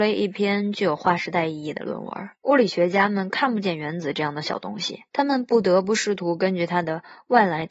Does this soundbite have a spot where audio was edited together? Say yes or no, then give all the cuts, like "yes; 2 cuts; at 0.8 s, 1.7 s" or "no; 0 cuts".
yes; 2 cuts; at 2.4 s, 5.1 s